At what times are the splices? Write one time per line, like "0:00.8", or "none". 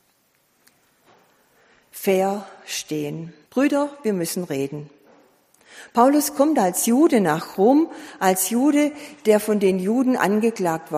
0:03.5